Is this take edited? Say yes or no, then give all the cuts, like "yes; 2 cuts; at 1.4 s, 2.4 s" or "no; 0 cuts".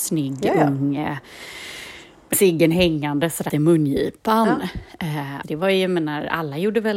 yes; 3 cuts; at 2.3 s, 3.5 s, 5.4 s